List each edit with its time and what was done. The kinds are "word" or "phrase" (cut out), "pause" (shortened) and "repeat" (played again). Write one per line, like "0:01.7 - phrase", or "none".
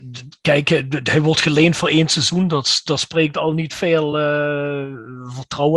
none